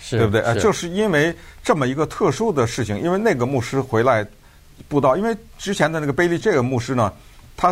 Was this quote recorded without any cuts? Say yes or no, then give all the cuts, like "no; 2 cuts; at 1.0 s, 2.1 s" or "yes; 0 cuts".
no; 1 cut; at 6.4 s